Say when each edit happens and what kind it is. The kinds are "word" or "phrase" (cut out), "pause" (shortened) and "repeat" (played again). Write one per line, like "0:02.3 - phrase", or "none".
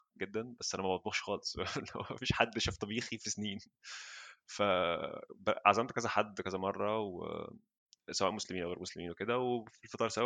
none